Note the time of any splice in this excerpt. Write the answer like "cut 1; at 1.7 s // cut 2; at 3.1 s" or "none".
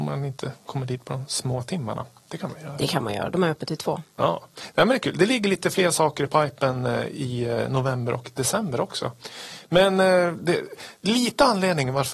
none